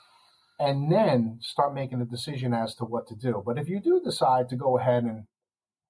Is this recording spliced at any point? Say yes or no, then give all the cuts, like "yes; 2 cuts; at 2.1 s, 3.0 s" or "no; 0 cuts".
no; 0 cuts